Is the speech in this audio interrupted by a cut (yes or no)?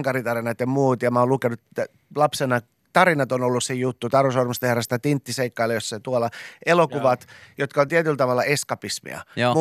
no